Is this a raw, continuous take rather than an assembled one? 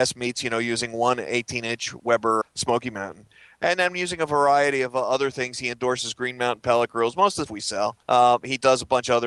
no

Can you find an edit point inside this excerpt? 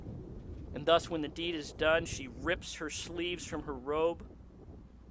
no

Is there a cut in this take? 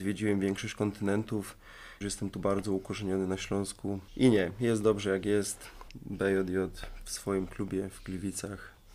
yes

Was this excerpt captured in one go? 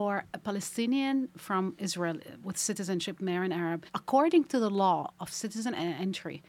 no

